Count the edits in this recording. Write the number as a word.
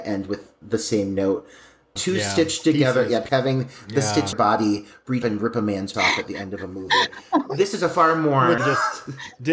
six